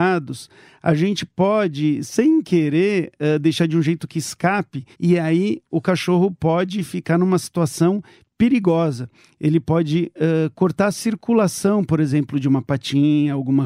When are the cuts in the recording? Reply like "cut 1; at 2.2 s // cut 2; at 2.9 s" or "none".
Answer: cut 1; at 4.9 s